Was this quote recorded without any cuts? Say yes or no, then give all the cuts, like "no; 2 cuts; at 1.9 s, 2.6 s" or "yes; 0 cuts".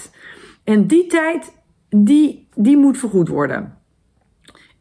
yes; 0 cuts